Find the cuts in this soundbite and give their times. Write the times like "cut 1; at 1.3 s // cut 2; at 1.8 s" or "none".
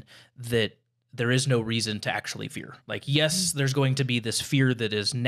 cut 1; at 2.8 s